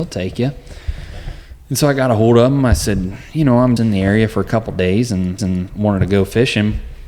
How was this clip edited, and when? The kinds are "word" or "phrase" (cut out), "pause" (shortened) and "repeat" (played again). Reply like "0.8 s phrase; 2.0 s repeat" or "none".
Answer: 3.8 s word; 5.4 s repeat